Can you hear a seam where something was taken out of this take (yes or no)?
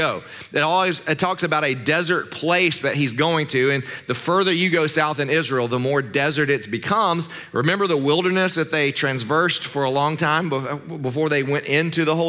no